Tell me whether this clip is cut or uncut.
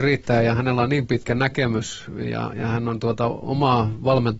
uncut